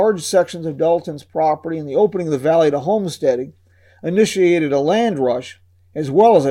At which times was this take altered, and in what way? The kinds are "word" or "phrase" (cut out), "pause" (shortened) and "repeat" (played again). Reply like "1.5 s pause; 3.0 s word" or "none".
none